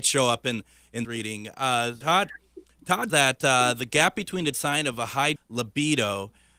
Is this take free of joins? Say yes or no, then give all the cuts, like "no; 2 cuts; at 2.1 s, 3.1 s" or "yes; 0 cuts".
no; 5 cuts; at 1.0 s, 2.0 s, 3.1 s, 4.5 s, 5.4 s